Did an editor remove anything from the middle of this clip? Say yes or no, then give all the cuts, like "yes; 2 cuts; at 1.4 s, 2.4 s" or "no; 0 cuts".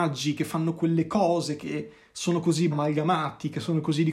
yes; 2 cuts; at 1.6 s, 2.7 s